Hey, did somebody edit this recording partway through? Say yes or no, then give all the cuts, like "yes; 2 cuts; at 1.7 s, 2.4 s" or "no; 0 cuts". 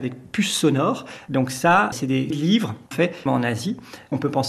yes; 4 cuts; at 1.9 s, 2.3 s, 2.9 s, 3.3 s